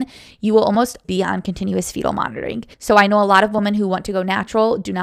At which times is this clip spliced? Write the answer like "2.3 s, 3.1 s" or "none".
1.0 s, 2.7 s